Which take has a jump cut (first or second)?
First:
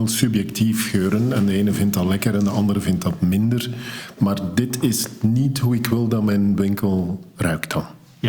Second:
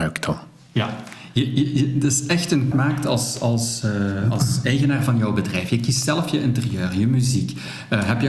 second